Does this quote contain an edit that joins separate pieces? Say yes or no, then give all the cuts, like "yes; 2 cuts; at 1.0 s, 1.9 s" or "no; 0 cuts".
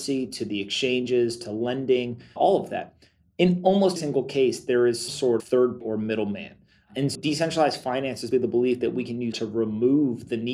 yes; 8 cuts; at 2.4 s, 4.0 s, 5.1 s, 5.4 s, 5.8 s, 7.1 s, 8.3 s, 9.3 s